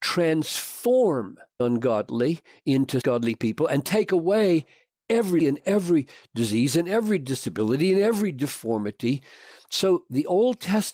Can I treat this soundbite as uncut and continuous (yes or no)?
no